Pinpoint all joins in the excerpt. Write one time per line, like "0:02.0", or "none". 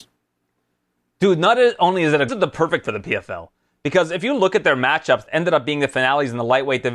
0:02.3
0:02.8
0:05.3